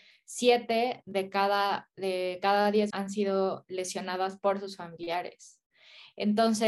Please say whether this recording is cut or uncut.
cut